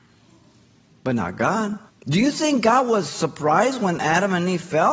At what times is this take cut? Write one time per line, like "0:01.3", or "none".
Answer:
0:01.9

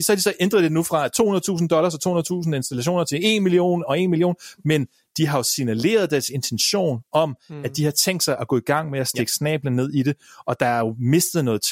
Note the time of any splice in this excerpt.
none

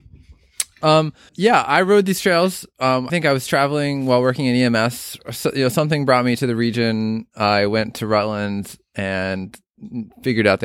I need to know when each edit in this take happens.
0:01.3
0:03.1

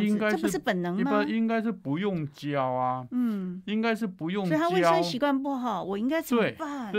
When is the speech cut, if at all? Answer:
none

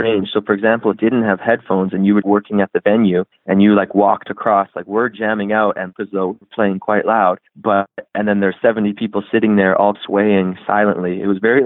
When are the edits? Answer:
0:00.9
0:02.2
0:03.3
0:05.9
0:07.5
0:09.9

